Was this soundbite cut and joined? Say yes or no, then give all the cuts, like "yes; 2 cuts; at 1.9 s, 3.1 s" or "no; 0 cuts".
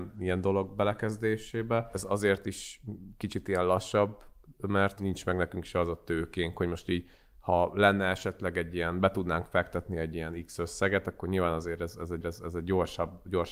yes; 1 cut; at 12.2 s